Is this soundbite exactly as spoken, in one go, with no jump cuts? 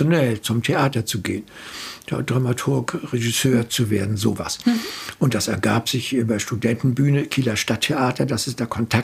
yes; 0 cuts

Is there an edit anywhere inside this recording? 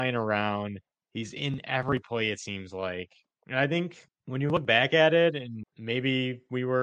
no; 0 cuts

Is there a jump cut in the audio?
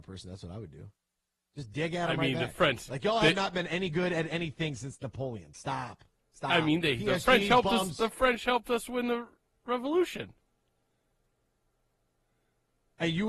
no; 0 cuts

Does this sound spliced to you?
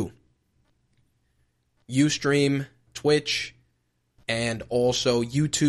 yes; 1 cut; at 2.9 s

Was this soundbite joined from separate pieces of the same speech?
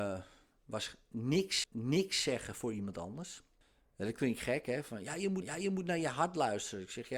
yes; 3 cuts; at 1.6 s, 3.6 s, 5.4 s

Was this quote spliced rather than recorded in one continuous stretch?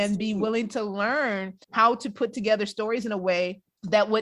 yes; 1 cut; at 1.6 s

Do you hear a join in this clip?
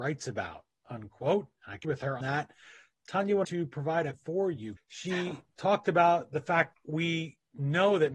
yes; 6 cuts; at 1.8 s, 2.2 s, 3.4 s, 4.1 s, 4.8 s, 6.7 s

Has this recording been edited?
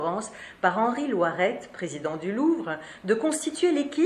no; 0 cuts

